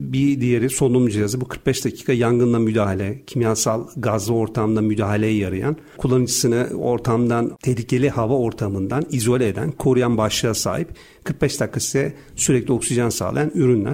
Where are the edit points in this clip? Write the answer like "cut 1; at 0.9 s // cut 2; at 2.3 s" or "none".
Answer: none